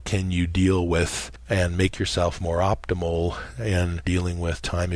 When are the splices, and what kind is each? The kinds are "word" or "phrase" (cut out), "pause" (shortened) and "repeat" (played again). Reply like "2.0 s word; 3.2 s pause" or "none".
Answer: none